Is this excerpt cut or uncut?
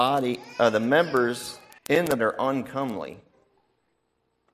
cut